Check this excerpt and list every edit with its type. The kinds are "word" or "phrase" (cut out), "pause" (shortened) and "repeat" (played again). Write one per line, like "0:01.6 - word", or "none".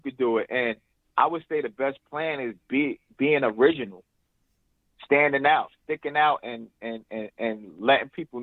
none

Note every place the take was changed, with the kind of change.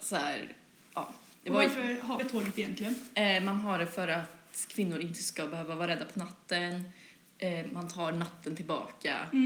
0:02.2 - word

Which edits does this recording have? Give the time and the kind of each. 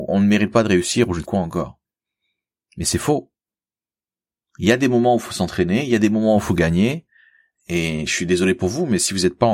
0:01.2 - word

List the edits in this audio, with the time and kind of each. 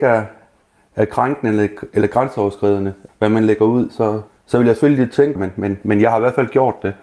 0:03.1 - word
0:04.3 - pause
0:05.4 - phrase

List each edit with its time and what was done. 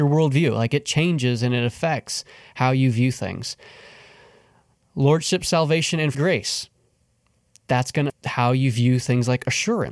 0:06.1 - word
0:08.1 - word

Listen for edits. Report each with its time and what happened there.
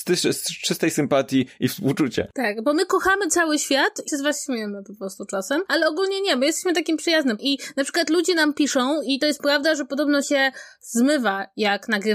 0:04.1 - word
0:07.4 - word
0:10.2 - word

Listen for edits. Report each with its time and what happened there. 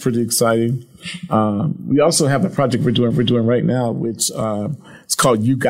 0:03.1 - repeat

